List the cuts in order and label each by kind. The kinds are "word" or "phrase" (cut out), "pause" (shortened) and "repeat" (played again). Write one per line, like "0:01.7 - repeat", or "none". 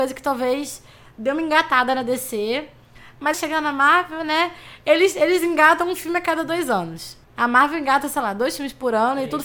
0:03.3 - phrase
0:07.2 - pause